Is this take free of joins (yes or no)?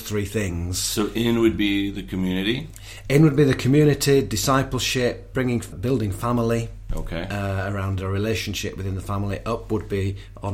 no